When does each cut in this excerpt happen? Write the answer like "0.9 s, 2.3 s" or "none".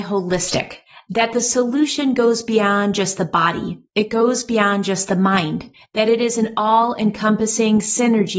none